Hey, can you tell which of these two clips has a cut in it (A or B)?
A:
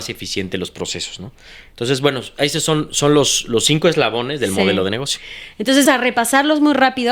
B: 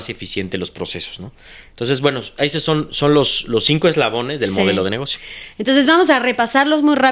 A